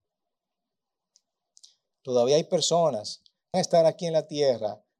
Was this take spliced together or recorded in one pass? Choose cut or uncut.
cut